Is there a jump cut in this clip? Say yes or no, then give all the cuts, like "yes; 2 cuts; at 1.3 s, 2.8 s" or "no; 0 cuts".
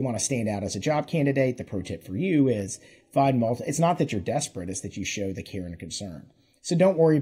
no; 0 cuts